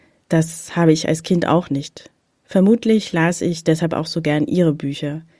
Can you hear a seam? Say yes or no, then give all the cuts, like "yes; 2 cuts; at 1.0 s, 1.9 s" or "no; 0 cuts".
no; 0 cuts